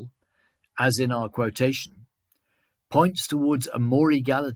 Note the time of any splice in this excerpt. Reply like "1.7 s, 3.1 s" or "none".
none

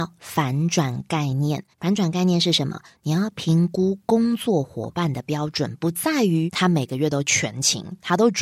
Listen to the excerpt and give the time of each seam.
1.7 s

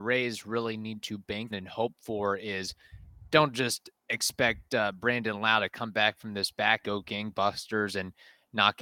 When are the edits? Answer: 1.5 s, 4.0 s, 6.8 s

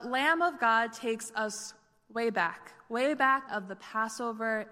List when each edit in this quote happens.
3.5 s

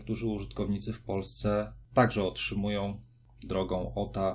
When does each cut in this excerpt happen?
1.8 s

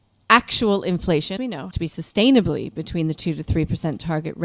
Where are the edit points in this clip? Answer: 1.4 s, 1.7 s

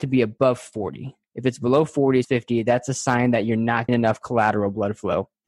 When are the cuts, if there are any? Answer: 1.2 s, 2.2 s, 3.9 s

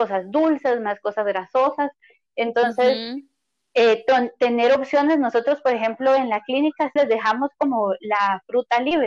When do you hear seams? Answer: 7.0 s

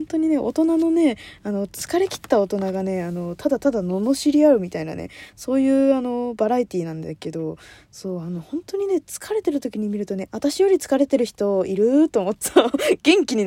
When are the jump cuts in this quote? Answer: 10.3 s, 12.4 s

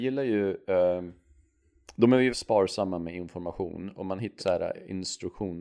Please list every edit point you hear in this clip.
2.3 s, 4.4 s

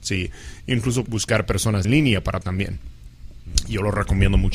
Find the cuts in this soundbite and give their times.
1.1 s, 1.8 s, 2.4 s

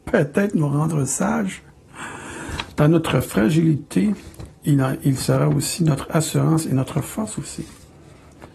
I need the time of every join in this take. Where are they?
4.6 s

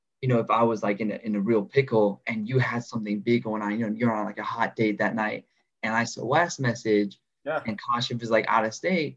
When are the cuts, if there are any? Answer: 6.1 s

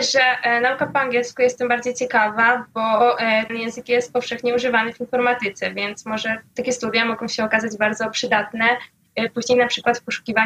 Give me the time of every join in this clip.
3.5 s

